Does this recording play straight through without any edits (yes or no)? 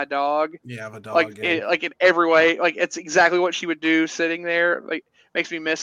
yes